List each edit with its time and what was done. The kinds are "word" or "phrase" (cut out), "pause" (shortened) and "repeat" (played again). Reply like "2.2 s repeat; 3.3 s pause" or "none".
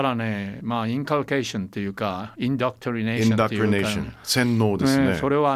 none